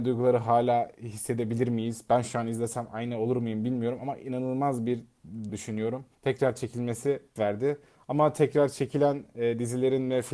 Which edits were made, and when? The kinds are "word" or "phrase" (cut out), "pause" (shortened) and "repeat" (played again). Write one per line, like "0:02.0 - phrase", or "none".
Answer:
0:05.5 - phrase
0:06.1 - pause
0:07.4 - word